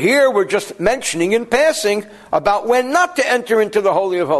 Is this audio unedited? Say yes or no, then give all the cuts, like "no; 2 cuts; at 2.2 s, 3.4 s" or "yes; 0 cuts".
yes; 0 cuts